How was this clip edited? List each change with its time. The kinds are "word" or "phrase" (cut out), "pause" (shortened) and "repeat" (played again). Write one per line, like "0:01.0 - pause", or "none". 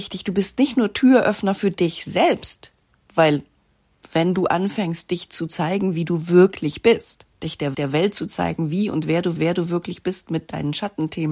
0:07.3 - pause
0:07.7 - repeat
0:09.4 - repeat